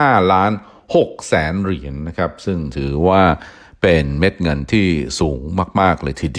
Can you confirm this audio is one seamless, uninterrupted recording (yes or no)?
yes